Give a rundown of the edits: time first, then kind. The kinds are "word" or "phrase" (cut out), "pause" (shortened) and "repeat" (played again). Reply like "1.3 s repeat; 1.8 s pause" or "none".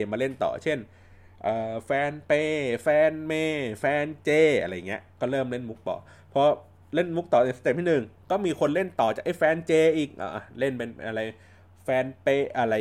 none